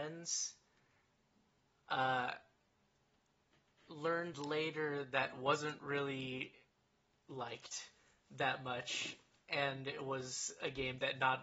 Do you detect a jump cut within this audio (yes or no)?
no